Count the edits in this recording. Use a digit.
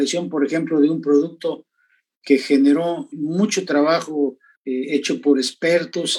2